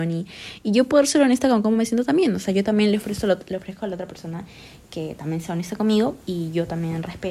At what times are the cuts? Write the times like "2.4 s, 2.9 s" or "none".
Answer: 6.2 s